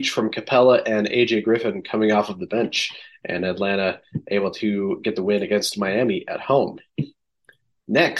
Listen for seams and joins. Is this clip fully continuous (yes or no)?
yes